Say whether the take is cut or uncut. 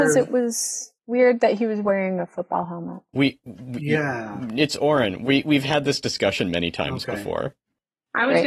cut